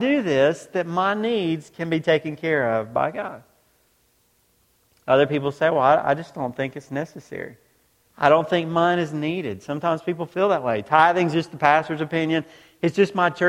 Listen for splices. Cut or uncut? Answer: uncut